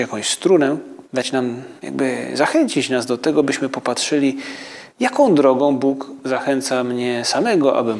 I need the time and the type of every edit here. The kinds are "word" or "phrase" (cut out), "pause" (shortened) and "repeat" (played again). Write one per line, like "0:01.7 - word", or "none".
0:01.0 - pause
0:01.8 - pause
0:04.9 - pause